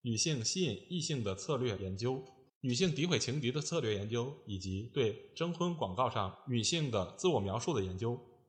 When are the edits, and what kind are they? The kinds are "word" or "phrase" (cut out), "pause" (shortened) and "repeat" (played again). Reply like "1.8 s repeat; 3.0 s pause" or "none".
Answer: 2.5 s pause